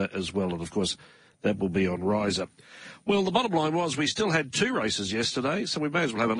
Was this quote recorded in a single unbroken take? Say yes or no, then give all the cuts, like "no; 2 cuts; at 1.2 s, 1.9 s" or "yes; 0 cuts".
yes; 0 cuts